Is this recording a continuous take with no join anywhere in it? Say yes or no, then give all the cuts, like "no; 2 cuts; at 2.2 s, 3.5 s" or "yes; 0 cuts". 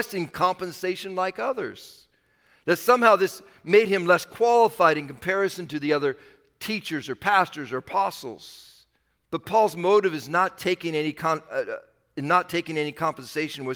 no; 1 cut; at 9.1 s